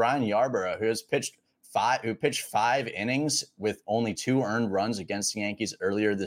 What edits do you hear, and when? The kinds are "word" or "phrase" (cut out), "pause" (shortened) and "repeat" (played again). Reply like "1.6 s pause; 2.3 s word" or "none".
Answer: none